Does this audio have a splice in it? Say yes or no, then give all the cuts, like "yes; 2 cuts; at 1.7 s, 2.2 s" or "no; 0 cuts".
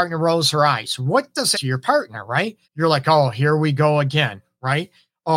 yes; 2 cuts; at 1.5 s, 2.6 s